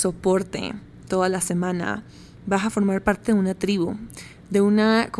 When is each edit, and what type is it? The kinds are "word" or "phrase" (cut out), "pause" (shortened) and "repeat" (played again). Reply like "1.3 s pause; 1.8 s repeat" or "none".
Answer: none